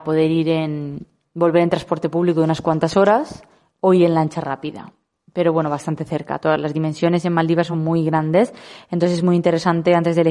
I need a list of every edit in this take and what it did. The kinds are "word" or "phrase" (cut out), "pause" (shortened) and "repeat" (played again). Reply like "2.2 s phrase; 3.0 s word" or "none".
none